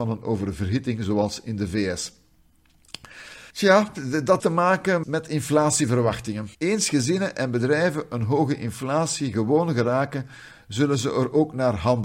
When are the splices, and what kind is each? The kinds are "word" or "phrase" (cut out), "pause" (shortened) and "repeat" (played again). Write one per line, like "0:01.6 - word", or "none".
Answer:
0:03.5 - pause
0:04.4 - phrase
0:05.0 - word
0:06.5 - pause